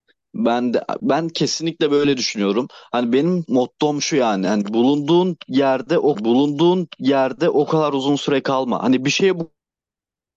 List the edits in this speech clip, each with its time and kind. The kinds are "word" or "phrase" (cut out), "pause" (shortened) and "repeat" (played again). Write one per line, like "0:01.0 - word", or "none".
0:03.5 - word
0:06.1 - repeat